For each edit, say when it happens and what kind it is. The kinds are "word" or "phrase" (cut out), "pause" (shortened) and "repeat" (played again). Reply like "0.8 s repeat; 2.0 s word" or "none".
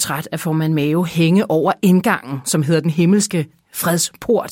none